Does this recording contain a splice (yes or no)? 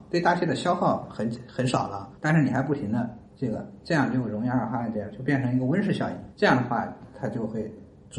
yes